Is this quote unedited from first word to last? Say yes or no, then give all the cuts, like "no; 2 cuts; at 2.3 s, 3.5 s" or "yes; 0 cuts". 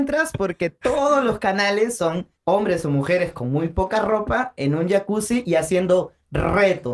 no; 1 cut; at 2.4 s